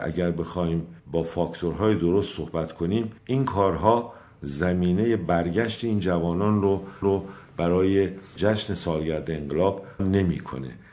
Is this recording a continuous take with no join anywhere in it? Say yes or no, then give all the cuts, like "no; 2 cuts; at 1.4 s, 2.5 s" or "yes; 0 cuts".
no; 4 cuts; at 1.0 s, 3.2 s, 7.0 s, 10.0 s